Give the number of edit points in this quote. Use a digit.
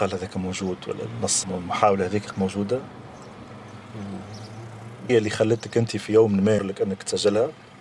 4